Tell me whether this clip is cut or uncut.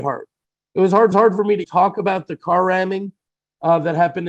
cut